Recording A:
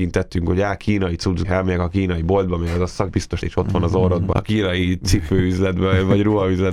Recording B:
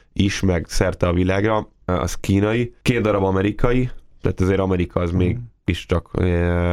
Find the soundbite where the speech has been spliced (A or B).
A